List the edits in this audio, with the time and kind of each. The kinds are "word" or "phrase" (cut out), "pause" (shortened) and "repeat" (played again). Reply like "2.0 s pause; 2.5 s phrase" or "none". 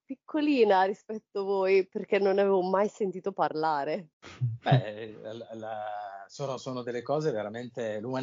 4.1 s pause